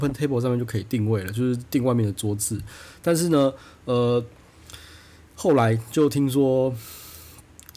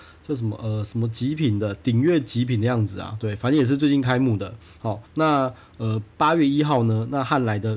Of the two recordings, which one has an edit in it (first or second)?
second